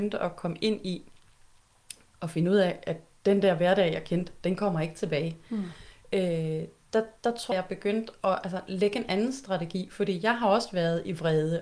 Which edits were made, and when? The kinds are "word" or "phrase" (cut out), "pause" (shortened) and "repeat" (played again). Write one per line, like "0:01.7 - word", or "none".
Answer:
0:07.5 - word